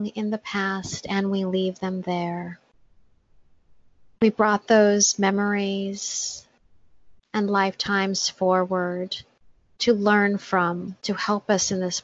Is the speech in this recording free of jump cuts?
no; 1 cut; at 11.0 s

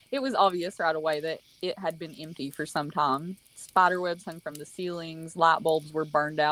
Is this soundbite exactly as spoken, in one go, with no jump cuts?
yes; 0 cuts

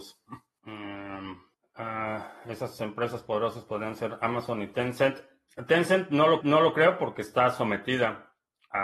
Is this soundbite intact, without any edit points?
no; 1 cut; at 6.4 s

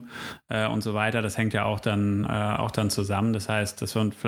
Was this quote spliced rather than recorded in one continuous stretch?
no; 0 cuts

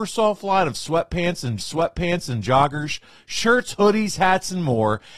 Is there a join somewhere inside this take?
yes; 1 cut; at 1.6 s

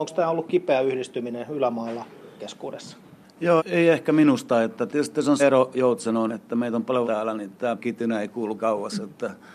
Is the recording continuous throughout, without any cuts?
no; 8 cuts; at 2.4 s, 3.6 s, 4.9 s, 5.4 s, 6.3 s, 7.0 s, 7.8 s, 8.6 s

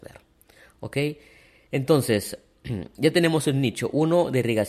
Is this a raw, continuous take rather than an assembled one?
yes; 0 cuts

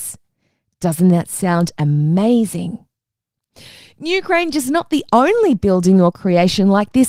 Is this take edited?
no; 0 cuts

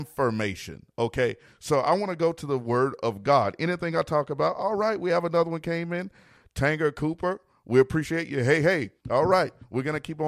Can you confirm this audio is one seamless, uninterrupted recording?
no; 1 cut; at 9.0 s

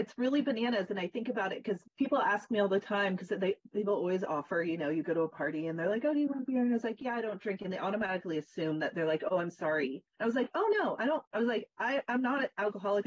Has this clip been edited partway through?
yes; 3 cuts; at 1.9 s, 10.1 s, 11.3 s

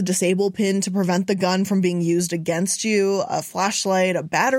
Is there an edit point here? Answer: no; 0 cuts

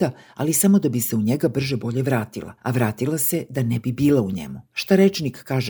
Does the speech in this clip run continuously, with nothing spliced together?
no; 2 cuts; at 2.6 s, 4.6 s

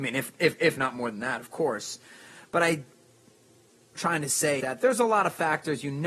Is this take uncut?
no; 2 cuts; at 4.0 s, 4.6 s

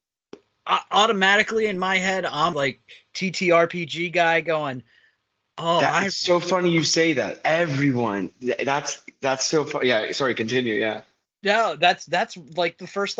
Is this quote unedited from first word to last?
no; 1 cut; at 2.5 s

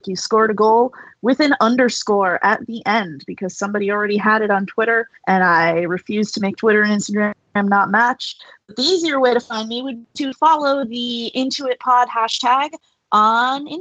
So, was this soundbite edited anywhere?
yes; 1 cut; at 5.2 s

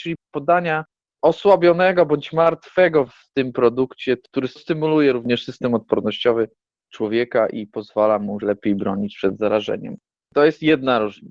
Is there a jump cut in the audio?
yes; 3 cuts; at 3.1 s, 4.6 s, 8.4 s

